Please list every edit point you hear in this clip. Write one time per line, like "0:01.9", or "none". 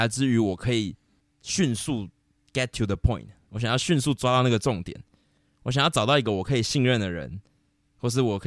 none